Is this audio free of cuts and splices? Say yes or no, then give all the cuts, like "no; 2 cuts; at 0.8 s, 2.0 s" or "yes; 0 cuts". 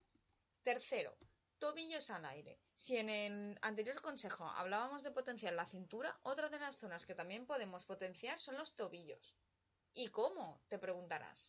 no; 1 cut; at 2.7 s